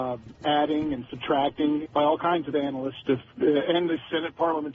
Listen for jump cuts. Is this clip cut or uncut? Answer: cut